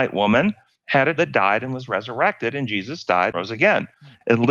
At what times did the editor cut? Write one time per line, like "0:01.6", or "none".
0:01.2
0:03.3